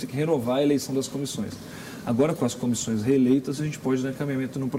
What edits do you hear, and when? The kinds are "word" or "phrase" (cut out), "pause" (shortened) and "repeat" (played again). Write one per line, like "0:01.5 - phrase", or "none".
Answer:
none